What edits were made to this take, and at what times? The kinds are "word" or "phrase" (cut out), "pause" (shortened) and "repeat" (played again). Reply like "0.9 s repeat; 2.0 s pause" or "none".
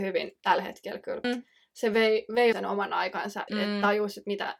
1.2 s phrase; 2.5 s word; 3.5 s word